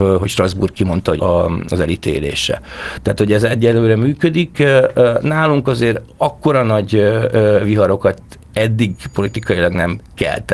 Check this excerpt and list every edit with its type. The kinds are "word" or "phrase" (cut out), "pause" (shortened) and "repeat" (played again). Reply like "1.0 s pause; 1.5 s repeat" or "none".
1.2 s phrase